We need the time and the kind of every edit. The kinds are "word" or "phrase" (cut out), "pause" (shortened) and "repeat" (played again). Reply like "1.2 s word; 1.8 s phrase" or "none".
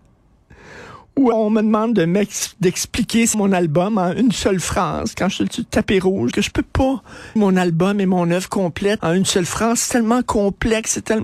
1.3 s word; 3.3 s word; 6.3 s word; 7.4 s word; 9.0 s word